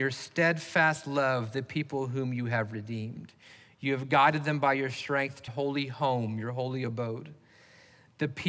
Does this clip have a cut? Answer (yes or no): yes